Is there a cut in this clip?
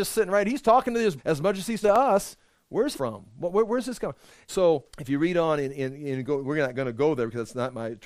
yes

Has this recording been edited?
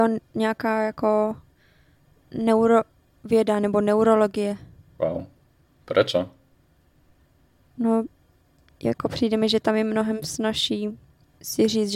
no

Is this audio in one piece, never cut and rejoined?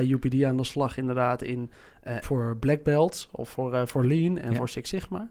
no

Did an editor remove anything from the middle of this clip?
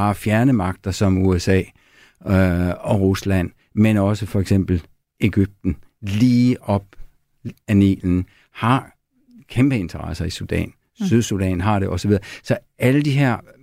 yes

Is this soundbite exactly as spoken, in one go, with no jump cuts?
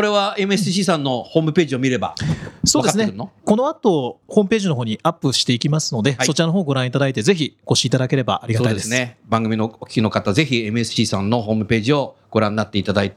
yes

